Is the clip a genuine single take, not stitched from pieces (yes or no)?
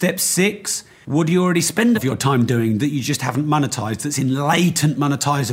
no